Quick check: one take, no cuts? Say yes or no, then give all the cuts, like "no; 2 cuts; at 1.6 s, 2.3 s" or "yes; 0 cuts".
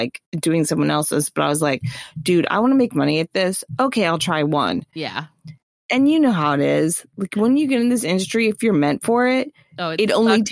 yes; 0 cuts